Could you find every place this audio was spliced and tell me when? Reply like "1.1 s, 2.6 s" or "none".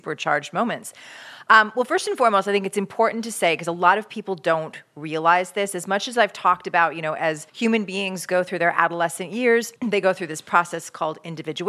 7.5 s, 9.8 s